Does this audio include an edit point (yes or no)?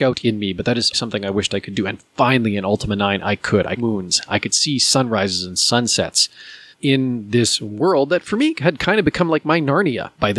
yes